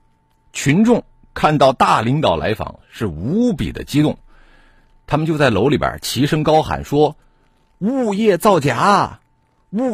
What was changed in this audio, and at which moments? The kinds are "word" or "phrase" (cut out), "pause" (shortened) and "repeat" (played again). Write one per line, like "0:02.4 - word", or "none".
none